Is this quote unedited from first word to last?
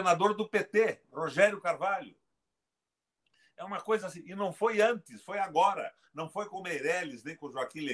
yes; 0 cuts

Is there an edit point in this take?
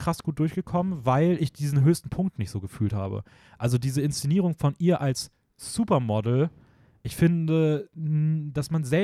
no; 0 cuts

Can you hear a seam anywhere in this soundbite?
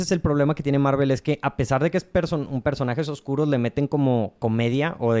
no; 0 cuts

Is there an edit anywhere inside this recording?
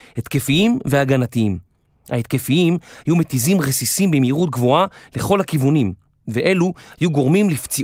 no; 0 cuts

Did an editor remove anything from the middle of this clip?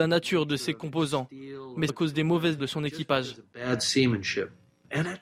yes; 2 cuts; at 1.9 s, 2.6 s

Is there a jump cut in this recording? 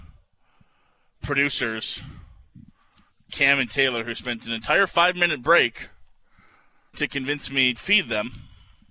yes; 2 cuts; at 6.9 s, 7.8 s

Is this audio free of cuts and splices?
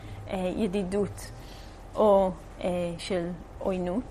yes; 0 cuts

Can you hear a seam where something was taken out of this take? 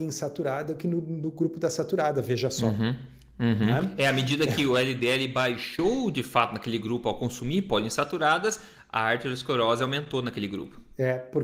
no; 0 cuts

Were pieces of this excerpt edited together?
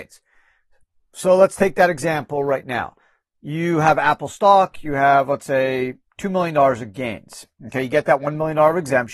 no; 0 cuts

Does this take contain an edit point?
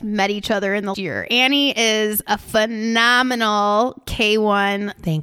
yes; 1 cut; at 0.9 s

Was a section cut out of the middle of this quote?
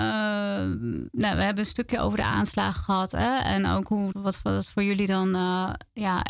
yes; 1 cut; at 4.1 s

